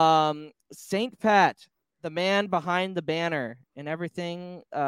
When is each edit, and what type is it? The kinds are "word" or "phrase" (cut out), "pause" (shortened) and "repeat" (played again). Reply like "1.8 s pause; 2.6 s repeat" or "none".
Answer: none

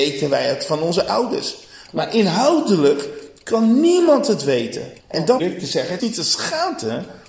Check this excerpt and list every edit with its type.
5.0 s pause; 5.4 s word; 6.0 s word

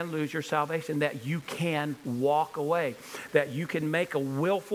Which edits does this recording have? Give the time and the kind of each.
none

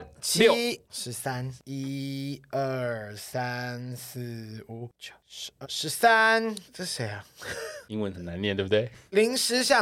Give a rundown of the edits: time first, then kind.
5.6 s word

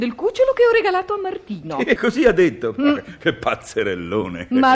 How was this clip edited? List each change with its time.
2.0 s word

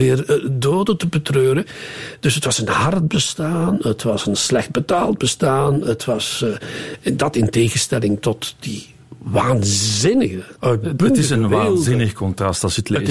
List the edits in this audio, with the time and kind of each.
10.6 s pause

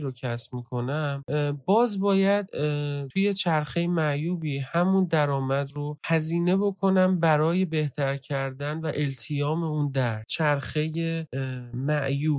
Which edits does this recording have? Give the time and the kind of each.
10.3 s phrase

